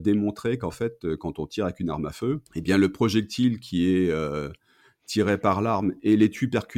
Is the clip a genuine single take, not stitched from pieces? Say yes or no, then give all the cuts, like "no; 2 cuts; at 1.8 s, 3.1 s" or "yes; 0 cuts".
no; 1 cut; at 2.5 s